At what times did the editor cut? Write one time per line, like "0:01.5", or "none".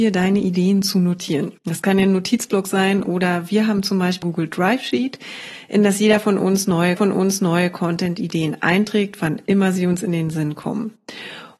0:01.6
0:04.2
0:07.0